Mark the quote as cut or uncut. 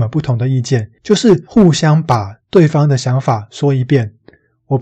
cut